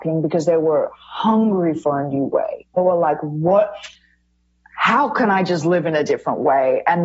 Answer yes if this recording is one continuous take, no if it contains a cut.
yes